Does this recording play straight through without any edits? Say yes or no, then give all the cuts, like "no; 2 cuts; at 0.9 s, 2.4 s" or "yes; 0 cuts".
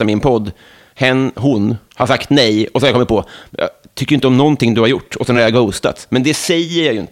yes; 0 cuts